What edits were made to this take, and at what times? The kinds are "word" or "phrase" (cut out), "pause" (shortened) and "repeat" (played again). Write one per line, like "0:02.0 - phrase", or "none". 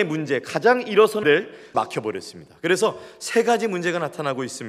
0:01.2 - word
0:01.7 - word